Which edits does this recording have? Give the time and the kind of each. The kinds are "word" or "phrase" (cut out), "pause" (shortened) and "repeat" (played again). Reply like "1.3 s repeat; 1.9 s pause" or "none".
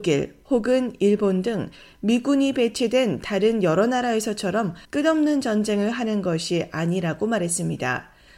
4.8 s pause